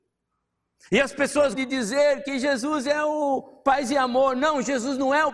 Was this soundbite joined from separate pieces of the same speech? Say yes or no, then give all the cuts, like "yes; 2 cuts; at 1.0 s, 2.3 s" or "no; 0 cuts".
yes; 1 cut; at 1.5 s